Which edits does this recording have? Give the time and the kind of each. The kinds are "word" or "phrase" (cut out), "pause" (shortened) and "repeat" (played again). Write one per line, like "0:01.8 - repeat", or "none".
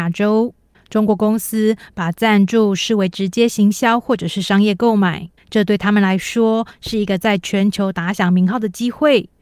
0:05.4 - pause